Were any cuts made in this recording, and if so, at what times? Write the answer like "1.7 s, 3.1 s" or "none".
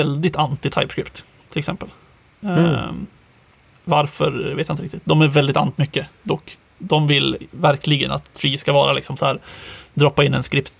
5.8 s